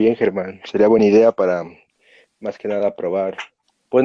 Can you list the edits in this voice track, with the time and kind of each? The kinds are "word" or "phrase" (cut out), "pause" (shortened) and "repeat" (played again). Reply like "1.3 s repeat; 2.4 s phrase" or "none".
none

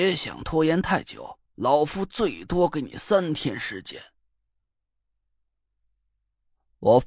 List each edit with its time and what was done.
1.5 s pause

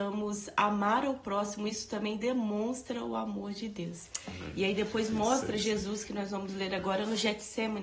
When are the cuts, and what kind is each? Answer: none

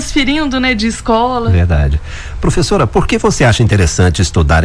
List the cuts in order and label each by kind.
none

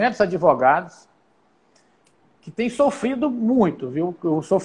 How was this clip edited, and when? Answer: none

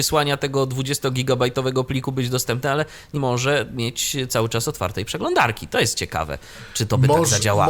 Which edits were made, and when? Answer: 3.2 s word

